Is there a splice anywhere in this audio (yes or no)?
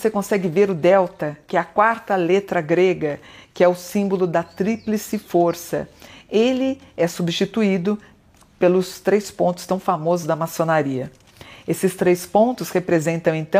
no